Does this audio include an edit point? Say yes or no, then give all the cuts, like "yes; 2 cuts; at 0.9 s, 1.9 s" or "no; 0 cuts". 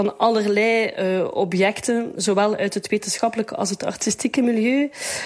no; 0 cuts